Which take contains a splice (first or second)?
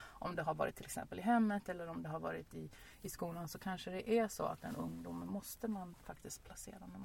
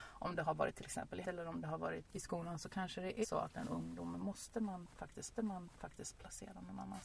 second